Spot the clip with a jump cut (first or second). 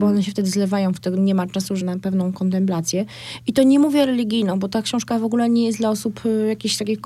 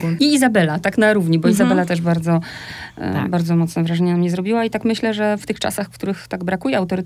first